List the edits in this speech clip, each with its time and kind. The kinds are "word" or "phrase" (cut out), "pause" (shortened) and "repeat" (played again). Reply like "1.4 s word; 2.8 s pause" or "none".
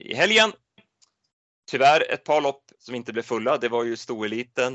2.7 s pause